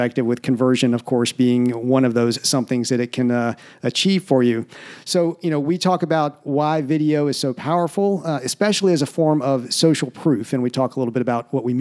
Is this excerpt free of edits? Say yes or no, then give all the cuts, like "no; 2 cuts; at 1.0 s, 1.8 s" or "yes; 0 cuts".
yes; 0 cuts